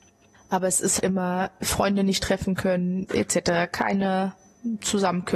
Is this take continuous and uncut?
no; 2 cuts; at 1.0 s, 3.1 s

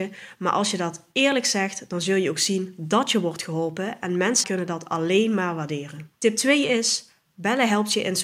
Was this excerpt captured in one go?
no; 2 cuts; at 4.4 s, 6.2 s

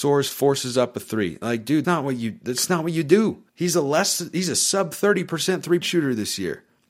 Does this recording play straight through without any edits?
no; 3 cuts; at 1.8 s, 3.5 s, 5.8 s

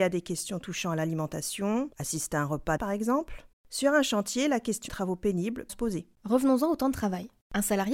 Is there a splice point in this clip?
yes; 6 cuts; at 1.9 s, 2.8 s, 3.5 s, 4.9 s, 5.7 s, 6.1 s

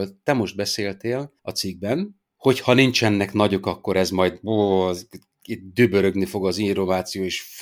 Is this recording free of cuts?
no; 1 cut; at 1.4 s

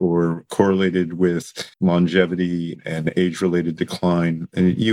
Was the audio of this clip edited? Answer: yes; 1 cut; at 1.7 s

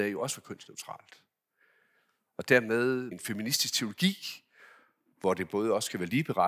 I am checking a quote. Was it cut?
yes; 1 cut; at 3.1 s

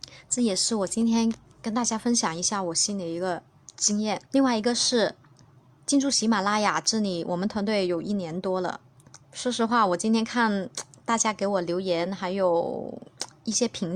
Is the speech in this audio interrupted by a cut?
yes; 4 cuts; at 3.6 s, 4.3 s, 5.4 s, 9.2 s

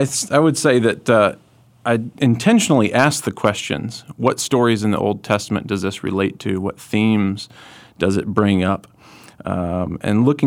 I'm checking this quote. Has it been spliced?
no; 0 cuts

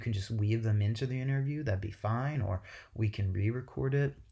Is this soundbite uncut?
yes; 0 cuts

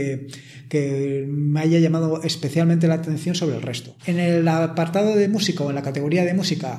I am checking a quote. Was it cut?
yes; 1 cut; at 4.0 s

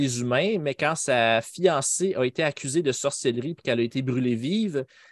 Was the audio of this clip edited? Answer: no; 0 cuts

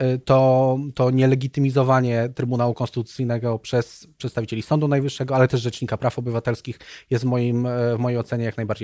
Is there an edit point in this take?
no; 0 cuts

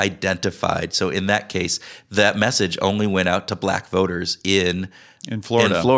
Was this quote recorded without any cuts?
yes; 0 cuts

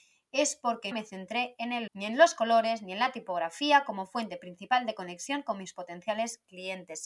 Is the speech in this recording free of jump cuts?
no; 2 cuts; at 0.9 s, 1.9 s

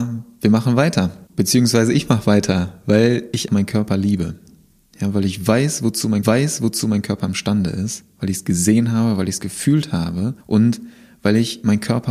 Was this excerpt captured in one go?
no; 4 cuts; at 1.3 s, 3.5 s, 6.2 s, 10.4 s

